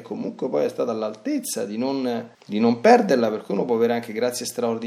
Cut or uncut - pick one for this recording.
cut